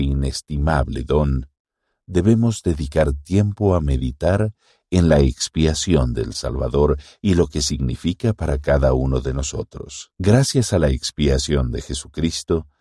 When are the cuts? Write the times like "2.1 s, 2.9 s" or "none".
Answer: 10.1 s